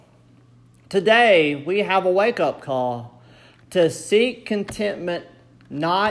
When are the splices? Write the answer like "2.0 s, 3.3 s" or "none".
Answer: none

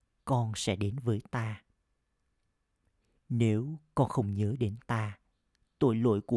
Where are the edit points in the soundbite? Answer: none

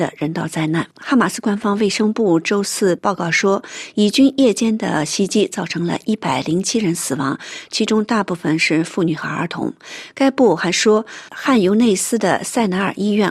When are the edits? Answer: 0.9 s

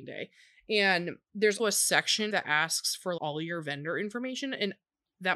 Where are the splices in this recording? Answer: 1.6 s, 2.3 s, 3.2 s

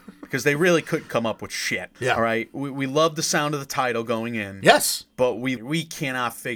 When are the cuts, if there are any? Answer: 2.0 s, 5.6 s

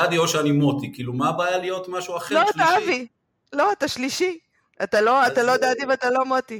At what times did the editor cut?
none

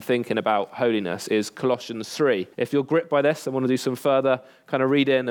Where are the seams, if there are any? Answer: 2.5 s

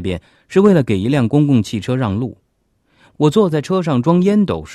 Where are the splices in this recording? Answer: none

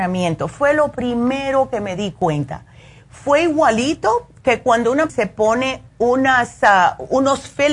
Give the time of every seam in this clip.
5.1 s

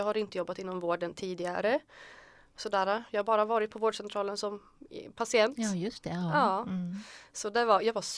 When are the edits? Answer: none

